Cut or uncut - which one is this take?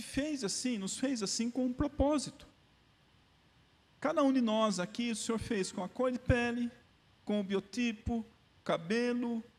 uncut